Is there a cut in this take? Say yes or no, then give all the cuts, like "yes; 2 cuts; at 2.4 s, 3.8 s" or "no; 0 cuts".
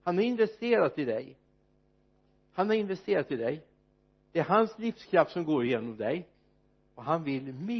no; 0 cuts